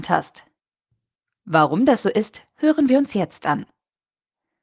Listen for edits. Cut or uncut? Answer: uncut